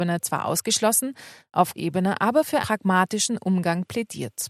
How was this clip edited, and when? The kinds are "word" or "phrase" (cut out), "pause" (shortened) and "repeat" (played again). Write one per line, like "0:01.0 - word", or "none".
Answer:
0:01.8 - word
0:02.6 - word